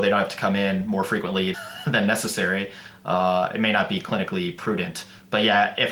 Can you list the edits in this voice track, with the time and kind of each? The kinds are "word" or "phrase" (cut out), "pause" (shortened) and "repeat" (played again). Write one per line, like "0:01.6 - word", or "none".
0:01.5 - word